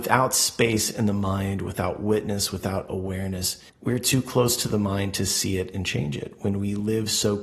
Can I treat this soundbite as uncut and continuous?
no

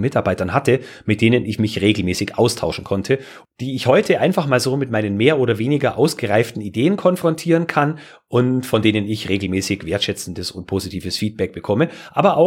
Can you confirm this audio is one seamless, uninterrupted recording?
yes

